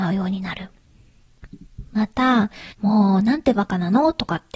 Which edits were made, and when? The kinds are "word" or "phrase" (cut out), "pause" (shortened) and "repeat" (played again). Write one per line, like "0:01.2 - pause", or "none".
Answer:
0:02.7 - pause